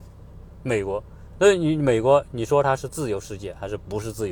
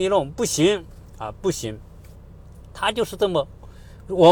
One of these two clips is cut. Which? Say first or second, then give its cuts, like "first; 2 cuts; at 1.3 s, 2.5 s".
second; 1 cut; at 1.1 s